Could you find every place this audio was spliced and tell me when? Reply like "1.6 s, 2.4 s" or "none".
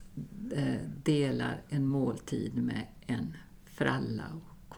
none